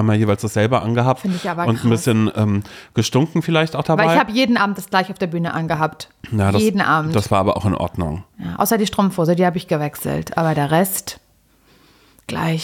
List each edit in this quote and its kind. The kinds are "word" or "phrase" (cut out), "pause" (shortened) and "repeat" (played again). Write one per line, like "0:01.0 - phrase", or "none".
none